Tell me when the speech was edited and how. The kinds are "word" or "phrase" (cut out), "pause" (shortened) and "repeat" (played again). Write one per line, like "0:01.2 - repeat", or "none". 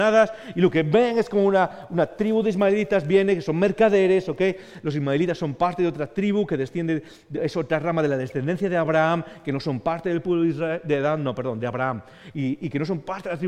none